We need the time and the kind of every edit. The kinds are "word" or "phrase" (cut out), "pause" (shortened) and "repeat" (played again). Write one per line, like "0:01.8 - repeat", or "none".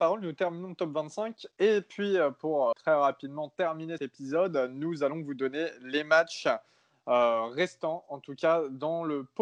0:02.7 - word
0:04.0 - word